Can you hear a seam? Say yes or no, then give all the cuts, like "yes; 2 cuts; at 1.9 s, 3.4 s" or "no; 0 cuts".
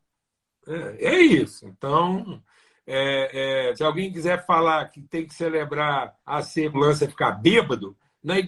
yes; 3 cuts; at 3.7 s, 6.2 s, 6.7 s